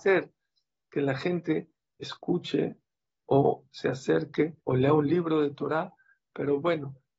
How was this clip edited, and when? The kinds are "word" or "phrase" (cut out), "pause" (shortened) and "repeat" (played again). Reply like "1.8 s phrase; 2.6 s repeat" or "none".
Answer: 4.6 s pause